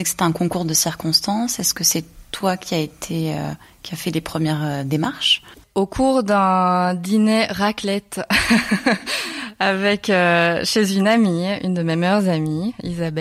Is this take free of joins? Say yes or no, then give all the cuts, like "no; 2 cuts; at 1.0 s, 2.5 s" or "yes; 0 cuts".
yes; 0 cuts